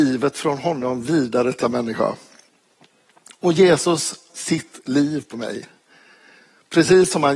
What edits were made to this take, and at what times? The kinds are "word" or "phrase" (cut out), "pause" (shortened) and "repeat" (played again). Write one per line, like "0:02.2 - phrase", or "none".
0:01.6 - word
0:02.5 - pause
0:04.3 - word
0:05.3 - word